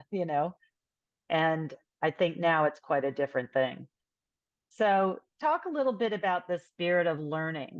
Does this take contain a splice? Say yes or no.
no